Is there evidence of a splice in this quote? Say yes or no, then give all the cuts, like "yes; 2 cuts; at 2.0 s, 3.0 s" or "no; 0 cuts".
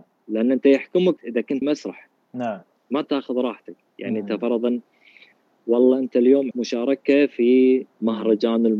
yes; 5 cuts; at 1.2 s, 1.6 s, 3.0 s, 6.5 s, 7.9 s